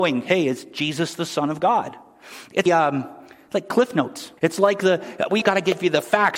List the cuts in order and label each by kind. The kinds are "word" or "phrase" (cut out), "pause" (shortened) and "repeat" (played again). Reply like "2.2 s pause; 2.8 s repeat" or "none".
2.7 s phrase; 4.4 s pause; 5.4 s word